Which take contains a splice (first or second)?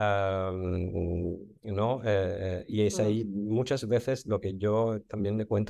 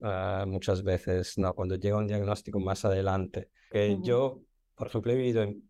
second